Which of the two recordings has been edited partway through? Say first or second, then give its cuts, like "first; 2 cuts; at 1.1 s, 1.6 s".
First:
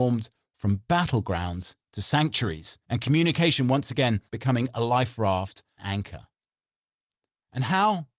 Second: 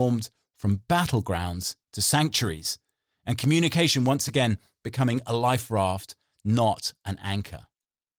first; 3 cuts; at 2.8 s, 4.3 s, 5.8 s